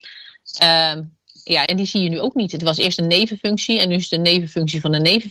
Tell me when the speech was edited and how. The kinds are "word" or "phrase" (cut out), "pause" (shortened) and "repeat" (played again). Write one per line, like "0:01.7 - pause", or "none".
0:01.7 - word